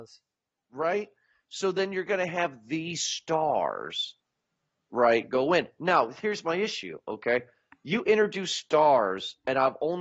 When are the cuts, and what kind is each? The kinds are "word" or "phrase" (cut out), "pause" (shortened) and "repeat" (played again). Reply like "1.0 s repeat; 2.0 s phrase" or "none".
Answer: none